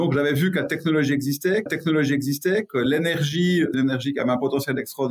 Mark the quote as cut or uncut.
cut